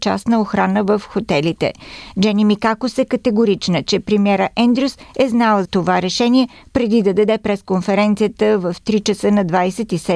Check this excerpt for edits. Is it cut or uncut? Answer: cut